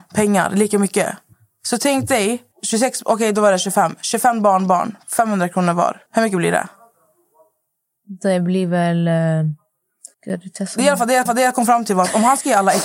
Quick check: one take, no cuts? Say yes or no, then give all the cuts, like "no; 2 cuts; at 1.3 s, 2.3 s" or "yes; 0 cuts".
no; 5 cuts; at 1.3 s, 2.5 s, 6.1 s, 10.1 s, 11.3 s